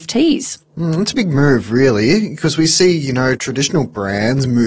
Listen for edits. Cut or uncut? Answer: cut